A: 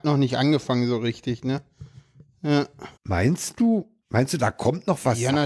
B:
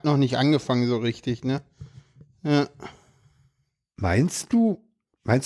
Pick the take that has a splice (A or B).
A